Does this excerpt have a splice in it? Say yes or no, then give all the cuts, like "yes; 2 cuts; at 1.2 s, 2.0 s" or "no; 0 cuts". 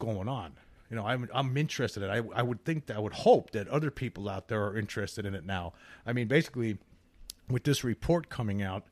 no; 0 cuts